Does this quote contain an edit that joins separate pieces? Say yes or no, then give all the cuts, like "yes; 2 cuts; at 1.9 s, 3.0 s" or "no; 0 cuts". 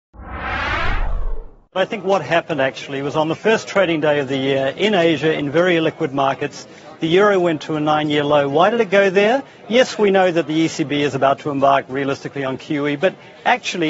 no; 0 cuts